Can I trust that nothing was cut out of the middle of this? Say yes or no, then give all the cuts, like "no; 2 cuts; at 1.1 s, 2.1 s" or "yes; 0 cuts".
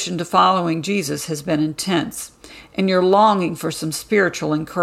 yes; 0 cuts